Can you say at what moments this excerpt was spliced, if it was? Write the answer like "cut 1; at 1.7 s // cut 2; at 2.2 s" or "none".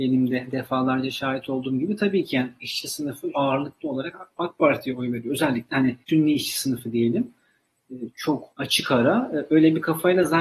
cut 1; at 3.3 s // cut 2; at 6.0 s // cut 3; at 8.5 s